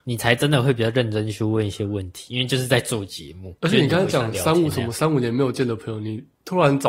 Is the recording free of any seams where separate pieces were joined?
no; 1 cut; at 3.6 s

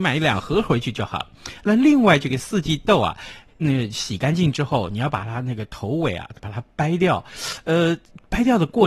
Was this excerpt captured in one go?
no; 1 cut; at 3.5 s

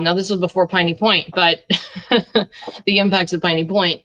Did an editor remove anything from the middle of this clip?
no; 0 cuts

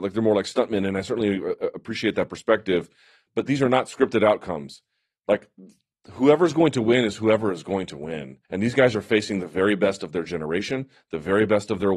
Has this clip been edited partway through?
yes; 1 cut; at 8.4 s

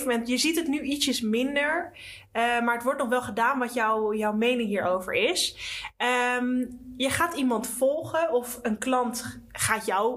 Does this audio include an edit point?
no; 0 cuts

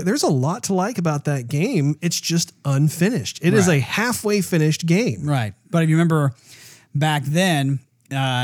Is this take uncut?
yes; 0 cuts

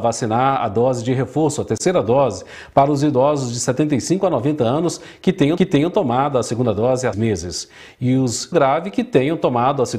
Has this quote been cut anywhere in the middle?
yes; 3 cuts; at 5.6 s, 7.1 s, 8.5 s

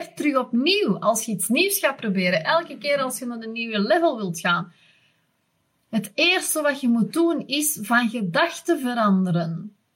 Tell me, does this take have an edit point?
no; 0 cuts

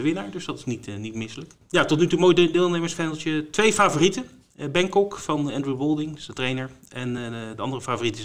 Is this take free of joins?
yes; 0 cuts

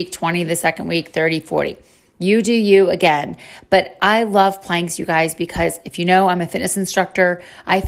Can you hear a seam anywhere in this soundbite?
no; 0 cuts

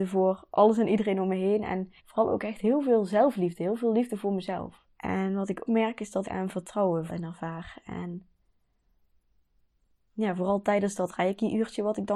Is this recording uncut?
no; 5 cuts; at 2.0 s, 4.9 s, 5.7 s, 6.2 s, 7.1 s

